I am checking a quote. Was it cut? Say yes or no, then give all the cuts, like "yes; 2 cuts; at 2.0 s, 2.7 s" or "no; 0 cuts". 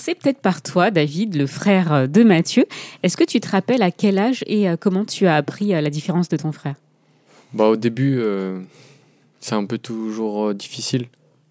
no; 0 cuts